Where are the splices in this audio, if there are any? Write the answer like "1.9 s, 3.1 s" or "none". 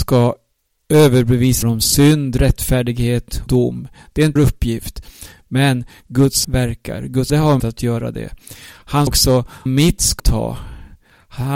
1.6 s, 3.5 s, 4.4 s, 6.4 s, 7.3 s, 7.6 s, 9.1 s, 9.7 s, 10.2 s